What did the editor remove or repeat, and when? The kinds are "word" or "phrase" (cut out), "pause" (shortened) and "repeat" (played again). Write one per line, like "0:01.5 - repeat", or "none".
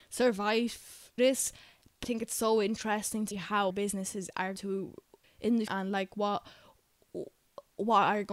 0:01.2 - word
0:02.0 - word
0:03.3 - word
0:03.7 - word
0:04.6 - word
0:05.2 - word
0:05.7 - word